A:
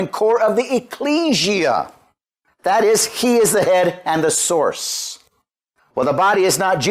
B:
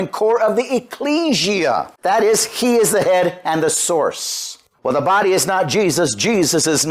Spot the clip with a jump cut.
B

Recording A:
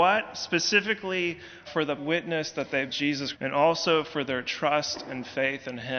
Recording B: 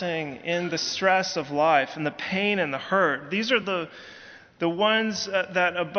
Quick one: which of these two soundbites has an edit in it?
A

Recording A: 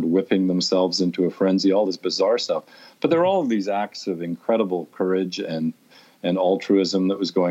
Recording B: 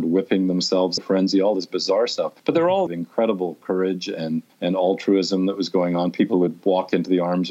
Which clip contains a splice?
B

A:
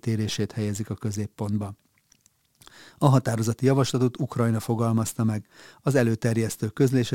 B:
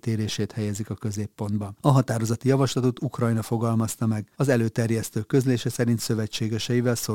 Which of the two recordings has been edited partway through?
B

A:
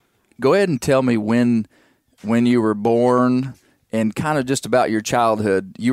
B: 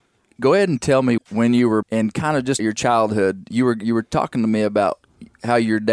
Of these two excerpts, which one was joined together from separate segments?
B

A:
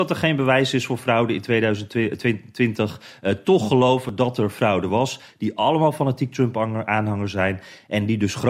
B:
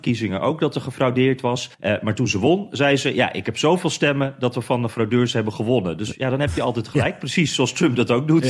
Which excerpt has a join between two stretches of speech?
B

